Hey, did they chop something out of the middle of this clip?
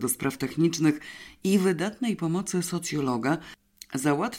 no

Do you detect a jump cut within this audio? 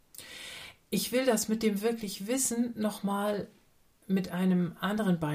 no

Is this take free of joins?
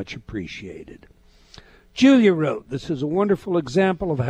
yes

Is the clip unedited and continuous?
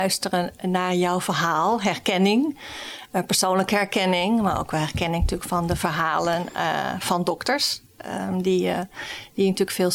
yes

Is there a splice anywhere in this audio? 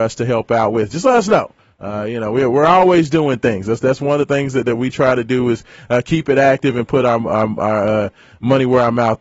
no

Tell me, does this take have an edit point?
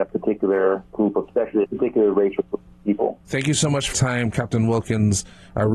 yes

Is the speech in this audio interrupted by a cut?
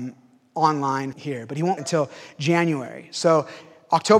yes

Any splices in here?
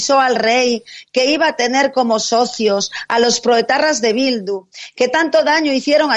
no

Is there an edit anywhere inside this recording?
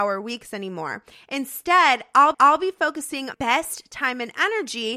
yes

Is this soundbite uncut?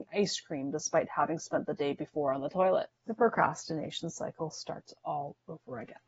no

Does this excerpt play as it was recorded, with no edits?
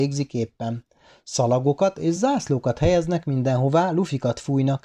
yes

